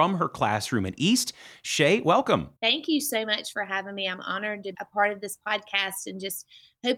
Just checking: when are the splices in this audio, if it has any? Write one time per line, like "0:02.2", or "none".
0:02.6
0:04.7